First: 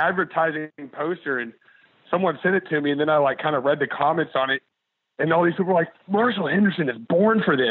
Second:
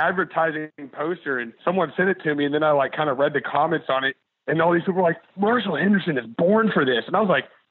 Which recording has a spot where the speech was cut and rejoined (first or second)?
second